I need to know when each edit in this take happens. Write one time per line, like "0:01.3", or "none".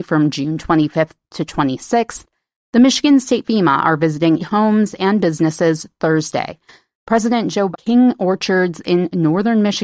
0:03.4
0:04.4
0:07.7